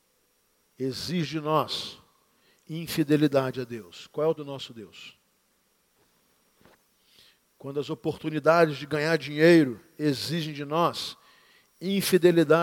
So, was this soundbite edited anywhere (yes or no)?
yes